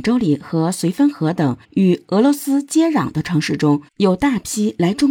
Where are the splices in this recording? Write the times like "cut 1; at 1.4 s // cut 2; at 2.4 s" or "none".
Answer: cut 1; at 1.6 s // cut 2; at 3.9 s